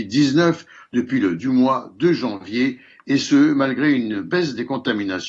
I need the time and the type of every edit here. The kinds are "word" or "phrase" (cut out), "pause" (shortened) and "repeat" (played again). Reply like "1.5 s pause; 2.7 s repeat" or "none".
1.4 s word